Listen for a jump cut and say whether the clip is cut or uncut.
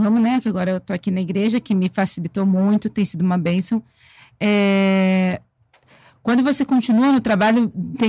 uncut